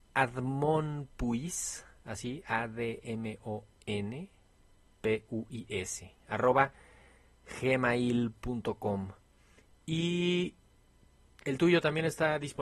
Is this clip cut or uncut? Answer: uncut